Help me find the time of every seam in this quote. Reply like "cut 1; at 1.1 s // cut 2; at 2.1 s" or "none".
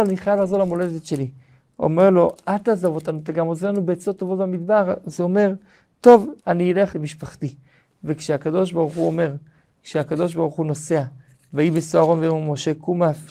cut 1; at 6.4 s // cut 2; at 6.9 s